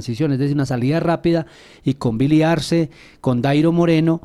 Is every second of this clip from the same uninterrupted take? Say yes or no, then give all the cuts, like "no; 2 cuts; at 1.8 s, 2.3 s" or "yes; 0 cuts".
yes; 0 cuts